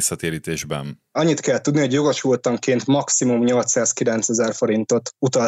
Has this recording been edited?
no; 0 cuts

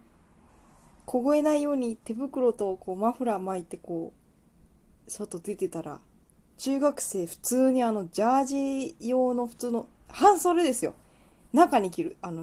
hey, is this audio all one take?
yes; 0 cuts

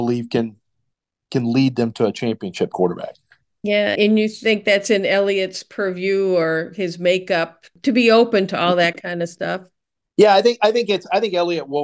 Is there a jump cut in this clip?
yes; 2 cuts; at 2.7 s, 3.9 s

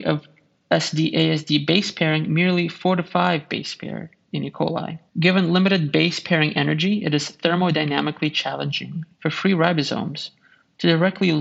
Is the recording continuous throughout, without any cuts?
no; 2 cuts; at 5.1 s, 9.1 s

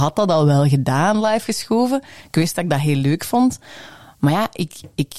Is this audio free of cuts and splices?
yes; 0 cuts

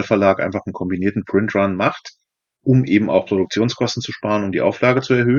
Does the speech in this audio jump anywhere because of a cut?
no; 0 cuts

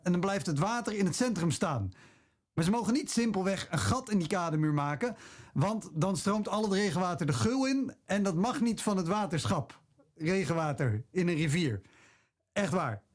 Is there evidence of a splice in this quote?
no; 0 cuts

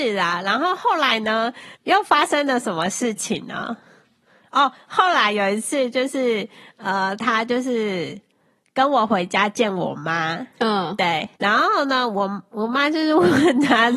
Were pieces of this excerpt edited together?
yes; 2 cuts; at 1.7 s, 11.4 s

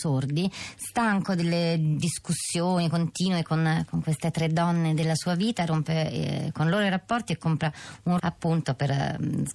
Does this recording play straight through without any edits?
no; 1 cut; at 8.2 s

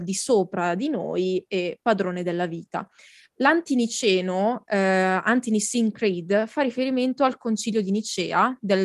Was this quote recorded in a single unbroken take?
yes; 0 cuts

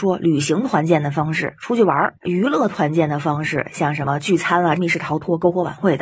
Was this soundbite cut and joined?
yes; 1 cut; at 4.8 s

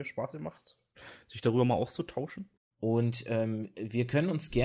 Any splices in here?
yes; 1 cut; at 2.6 s

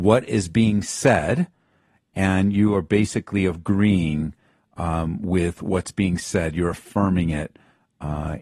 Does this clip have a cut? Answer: no; 0 cuts

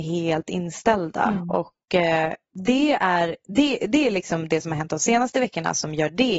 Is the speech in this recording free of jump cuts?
yes; 0 cuts

